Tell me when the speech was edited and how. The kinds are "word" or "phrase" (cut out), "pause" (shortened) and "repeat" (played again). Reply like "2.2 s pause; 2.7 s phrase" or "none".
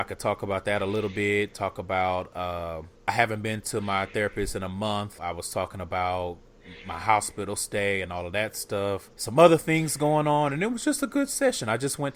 3.0 s pause; 5.2 s word; 9.1 s pause